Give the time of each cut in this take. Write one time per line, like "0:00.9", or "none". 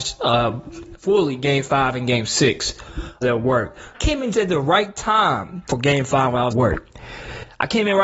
0:03.2
0:03.9
0:04.3
0:06.5